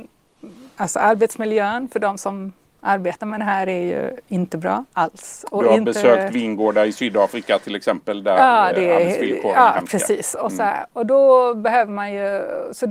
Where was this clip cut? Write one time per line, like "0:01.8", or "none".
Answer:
0:04.9